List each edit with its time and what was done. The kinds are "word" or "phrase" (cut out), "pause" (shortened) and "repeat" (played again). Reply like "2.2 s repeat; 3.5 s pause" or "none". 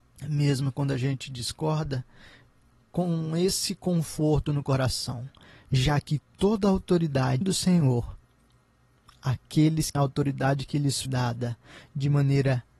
7.4 s word; 9.9 s word; 11.0 s word